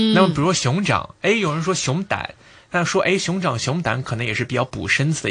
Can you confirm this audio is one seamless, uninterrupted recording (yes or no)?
yes